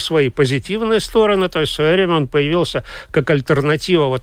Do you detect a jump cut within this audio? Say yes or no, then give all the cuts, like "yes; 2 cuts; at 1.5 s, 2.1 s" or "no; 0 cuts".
no; 0 cuts